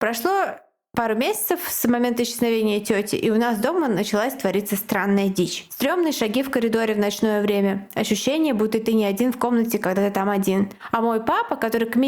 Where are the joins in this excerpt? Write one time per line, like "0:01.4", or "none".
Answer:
none